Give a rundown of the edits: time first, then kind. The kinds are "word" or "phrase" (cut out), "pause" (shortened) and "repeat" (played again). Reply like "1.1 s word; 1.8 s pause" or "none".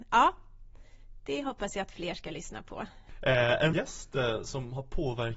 3.7 s word